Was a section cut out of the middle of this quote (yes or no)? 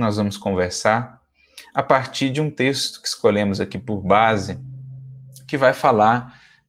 no